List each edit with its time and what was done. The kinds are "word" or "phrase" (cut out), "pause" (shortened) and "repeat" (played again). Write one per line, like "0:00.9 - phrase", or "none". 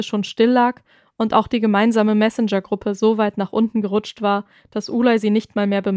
none

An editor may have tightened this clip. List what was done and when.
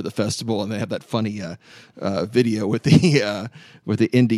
none

